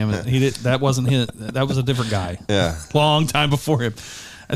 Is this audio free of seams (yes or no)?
yes